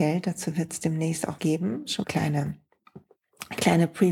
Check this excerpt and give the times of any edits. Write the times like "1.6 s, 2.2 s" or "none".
1.4 s, 2.0 s